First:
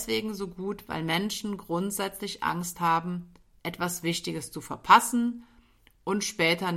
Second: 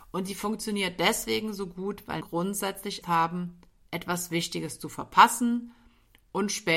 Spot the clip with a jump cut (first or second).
second